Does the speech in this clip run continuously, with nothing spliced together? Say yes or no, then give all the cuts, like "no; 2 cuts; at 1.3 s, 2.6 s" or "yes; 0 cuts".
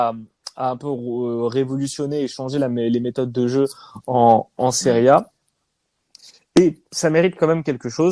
yes; 0 cuts